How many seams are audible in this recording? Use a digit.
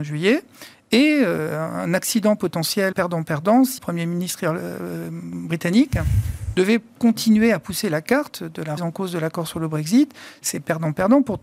3